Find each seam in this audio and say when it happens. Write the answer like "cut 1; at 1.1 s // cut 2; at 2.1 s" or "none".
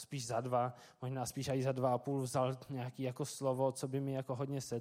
none